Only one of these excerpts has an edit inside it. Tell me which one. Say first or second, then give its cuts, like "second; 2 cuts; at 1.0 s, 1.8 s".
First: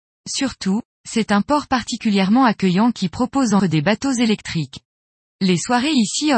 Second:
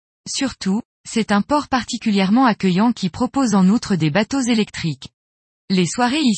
first; 1 cut; at 3.6 s